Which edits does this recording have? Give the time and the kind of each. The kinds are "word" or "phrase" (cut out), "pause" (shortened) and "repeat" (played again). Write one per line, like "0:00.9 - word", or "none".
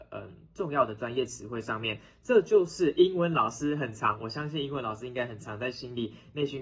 none